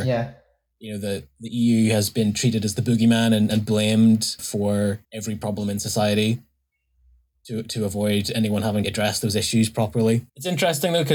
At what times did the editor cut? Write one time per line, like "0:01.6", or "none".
0:05.0
0:08.8